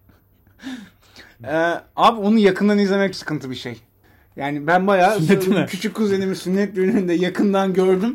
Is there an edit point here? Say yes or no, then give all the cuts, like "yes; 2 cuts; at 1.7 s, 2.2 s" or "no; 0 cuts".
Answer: yes; 2 cuts; at 3.1 s, 4.0 s